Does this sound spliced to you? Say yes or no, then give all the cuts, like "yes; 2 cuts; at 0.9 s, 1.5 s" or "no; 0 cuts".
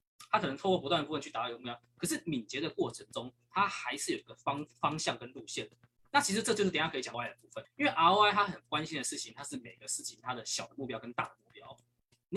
yes; 2 cuts; at 7.1 s, 7.6 s